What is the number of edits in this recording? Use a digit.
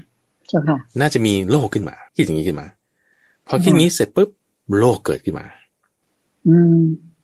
1